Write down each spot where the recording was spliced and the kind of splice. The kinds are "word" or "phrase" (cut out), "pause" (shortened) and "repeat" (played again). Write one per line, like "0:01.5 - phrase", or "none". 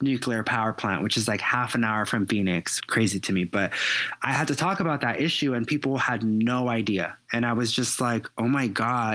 0:02.8 - phrase